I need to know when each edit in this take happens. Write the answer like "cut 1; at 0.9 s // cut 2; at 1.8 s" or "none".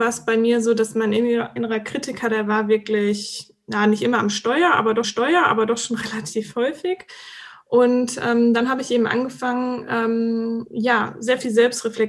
cut 1; at 5.0 s